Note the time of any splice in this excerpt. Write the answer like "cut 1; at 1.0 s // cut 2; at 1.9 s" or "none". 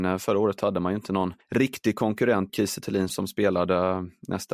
cut 1; at 1.4 s // cut 2; at 2.5 s // cut 3; at 3.1 s